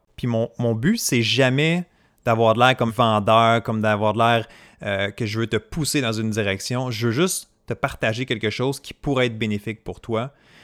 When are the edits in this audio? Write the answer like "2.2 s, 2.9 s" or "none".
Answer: 2.9 s